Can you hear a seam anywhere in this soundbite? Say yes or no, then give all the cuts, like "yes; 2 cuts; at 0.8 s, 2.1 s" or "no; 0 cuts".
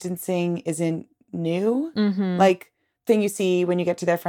yes; 1 cut; at 3.1 s